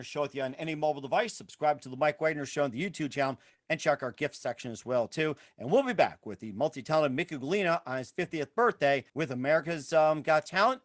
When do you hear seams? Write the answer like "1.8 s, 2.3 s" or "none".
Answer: 9.1 s